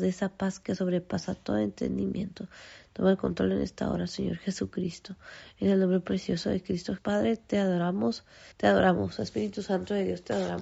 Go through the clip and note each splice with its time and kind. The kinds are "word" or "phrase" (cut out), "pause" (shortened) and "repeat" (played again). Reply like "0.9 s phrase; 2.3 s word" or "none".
7.0 s word; 8.5 s pause